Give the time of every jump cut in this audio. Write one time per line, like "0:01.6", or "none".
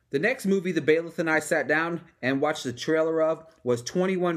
none